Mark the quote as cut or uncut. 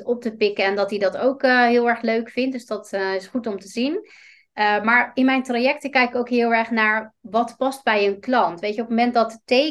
uncut